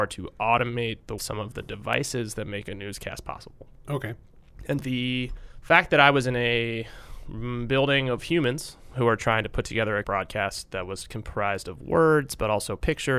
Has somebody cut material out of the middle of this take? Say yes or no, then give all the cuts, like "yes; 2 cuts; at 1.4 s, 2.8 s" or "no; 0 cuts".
yes; 3 cuts; at 1.2 s, 4.8 s, 10.0 s